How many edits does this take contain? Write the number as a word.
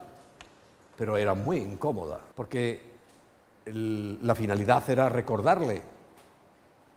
one